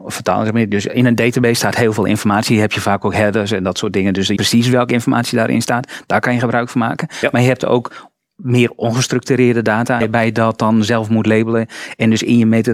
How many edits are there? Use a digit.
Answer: 2